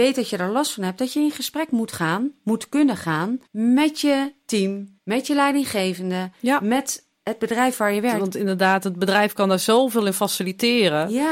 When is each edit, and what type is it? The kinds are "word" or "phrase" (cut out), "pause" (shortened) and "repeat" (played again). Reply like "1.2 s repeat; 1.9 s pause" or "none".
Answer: 3.5 s pause; 5.0 s pause